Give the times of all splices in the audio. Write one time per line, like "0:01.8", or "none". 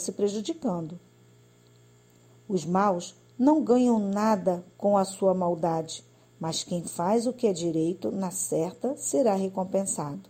none